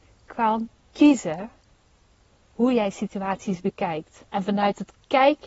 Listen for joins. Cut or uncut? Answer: cut